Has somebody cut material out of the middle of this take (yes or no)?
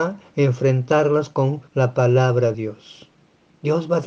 yes